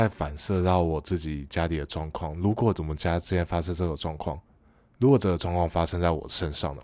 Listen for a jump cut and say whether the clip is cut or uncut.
uncut